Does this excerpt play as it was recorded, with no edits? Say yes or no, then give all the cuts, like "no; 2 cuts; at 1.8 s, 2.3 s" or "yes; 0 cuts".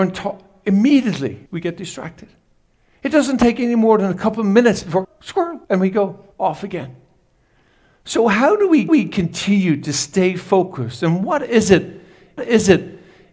no; 6 cuts; at 1.5 s, 5.0 s, 5.6 s, 6.3 s, 8.9 s, 12.4 s